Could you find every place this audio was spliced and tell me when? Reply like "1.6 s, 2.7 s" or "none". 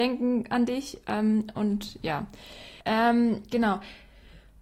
2.8 s